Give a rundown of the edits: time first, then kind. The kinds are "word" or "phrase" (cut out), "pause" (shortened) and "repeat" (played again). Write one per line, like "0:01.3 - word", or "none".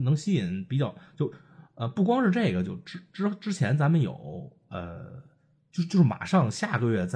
none